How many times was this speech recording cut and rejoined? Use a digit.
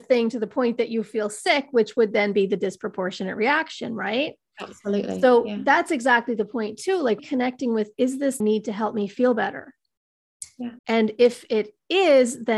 3